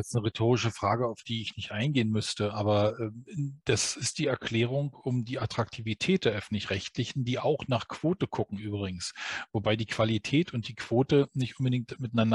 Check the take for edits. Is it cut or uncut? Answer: uncut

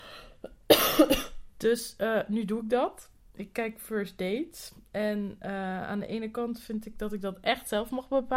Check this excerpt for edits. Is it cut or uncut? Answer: uncut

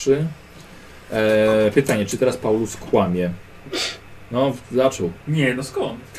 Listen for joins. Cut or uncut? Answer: uncut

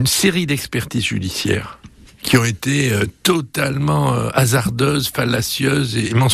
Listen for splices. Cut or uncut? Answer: uncut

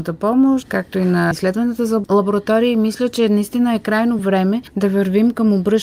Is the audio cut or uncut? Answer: uncut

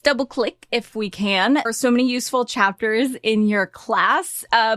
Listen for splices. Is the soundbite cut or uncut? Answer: cut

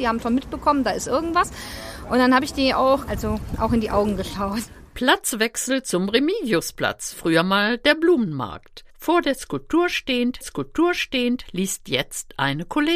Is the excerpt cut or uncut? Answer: cut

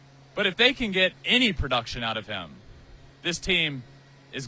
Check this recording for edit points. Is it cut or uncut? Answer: cut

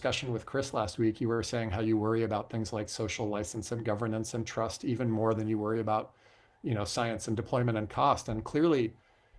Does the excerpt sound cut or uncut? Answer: uncut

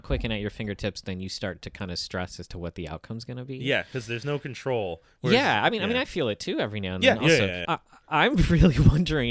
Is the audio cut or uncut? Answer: cut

